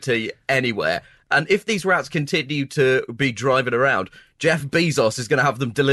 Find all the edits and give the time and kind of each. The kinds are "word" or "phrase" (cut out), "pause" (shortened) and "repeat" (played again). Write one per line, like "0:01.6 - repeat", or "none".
none